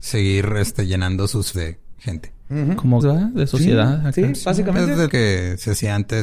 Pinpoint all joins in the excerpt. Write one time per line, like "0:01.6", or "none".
0:01.5
0:03.0
0:05.1